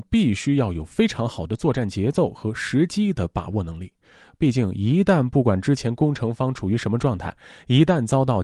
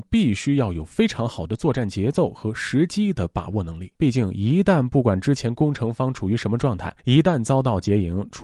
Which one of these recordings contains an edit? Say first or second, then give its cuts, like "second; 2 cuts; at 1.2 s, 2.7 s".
second; 2 cuts; at 4.0 s, 7.0 s